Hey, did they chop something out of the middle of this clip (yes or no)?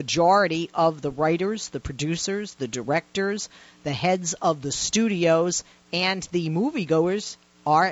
no